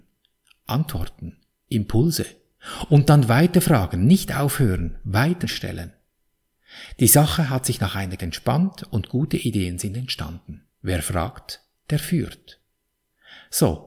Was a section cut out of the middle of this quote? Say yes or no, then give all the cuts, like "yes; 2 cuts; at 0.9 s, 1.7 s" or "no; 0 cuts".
yes; 3 cuts; at 5.4 s, 8.2 s, 10.8 s